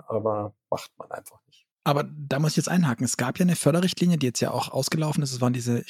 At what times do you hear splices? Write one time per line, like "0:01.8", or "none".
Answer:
0:01.7